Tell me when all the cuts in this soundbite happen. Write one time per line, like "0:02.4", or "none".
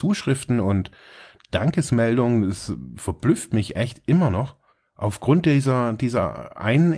0:04.7